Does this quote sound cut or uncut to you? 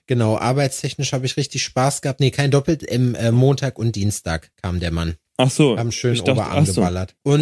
cut